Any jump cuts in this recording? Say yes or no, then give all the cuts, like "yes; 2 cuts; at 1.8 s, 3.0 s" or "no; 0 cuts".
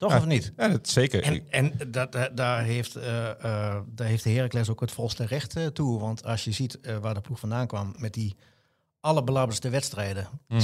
no; 0 cuts